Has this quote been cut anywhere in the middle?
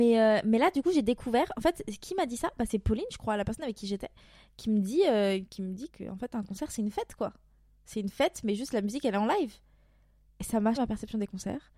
yes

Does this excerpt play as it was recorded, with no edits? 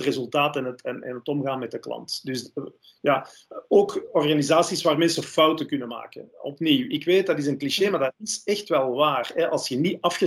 yes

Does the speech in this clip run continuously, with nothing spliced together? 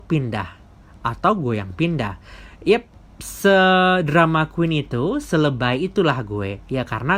yes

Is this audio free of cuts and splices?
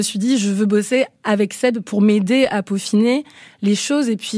yes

